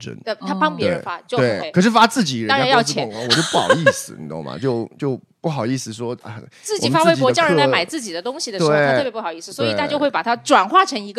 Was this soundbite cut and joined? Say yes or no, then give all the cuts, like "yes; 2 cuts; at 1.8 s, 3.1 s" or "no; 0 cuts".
yes; 1 cut; at 1.6 s